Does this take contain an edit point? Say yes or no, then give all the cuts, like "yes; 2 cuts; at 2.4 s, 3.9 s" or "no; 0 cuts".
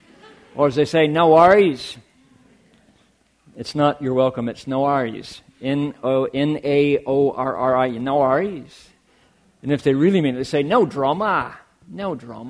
no; 0 cuts